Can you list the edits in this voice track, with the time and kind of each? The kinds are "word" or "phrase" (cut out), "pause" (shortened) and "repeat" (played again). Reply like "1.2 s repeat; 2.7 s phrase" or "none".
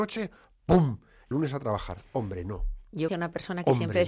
1.3 s word; 3.1 s word